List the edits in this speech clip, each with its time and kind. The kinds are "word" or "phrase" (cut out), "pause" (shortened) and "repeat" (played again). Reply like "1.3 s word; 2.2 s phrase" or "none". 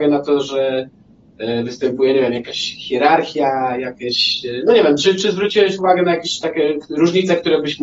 none